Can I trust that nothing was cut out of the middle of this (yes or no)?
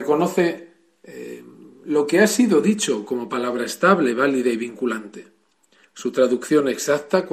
yes